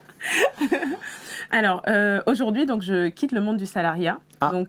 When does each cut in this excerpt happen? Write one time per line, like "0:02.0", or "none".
0:01.5